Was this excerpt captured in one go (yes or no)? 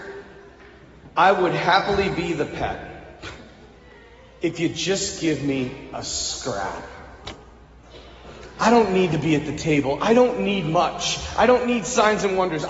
yes